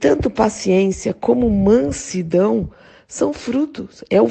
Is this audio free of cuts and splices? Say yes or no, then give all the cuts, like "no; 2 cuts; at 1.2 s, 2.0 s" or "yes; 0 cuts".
yes; 0 cuts